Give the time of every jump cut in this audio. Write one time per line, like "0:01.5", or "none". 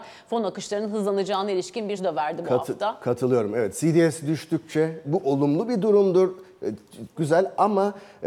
0:02.0
0:05.0
0:07.2